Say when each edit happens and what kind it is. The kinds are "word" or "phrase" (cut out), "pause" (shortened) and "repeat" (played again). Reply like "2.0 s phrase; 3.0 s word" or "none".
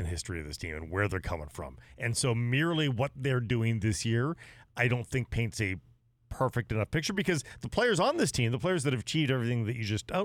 none